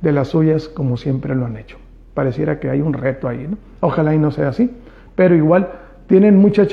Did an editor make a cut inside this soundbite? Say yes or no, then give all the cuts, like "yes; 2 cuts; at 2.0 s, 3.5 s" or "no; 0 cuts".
no; 0 cuts